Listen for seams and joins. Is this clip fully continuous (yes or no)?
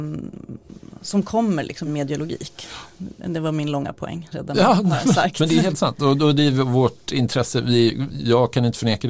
no